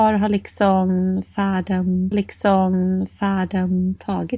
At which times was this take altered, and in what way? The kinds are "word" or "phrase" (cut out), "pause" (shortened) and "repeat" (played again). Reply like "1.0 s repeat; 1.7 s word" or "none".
2.1 s repeat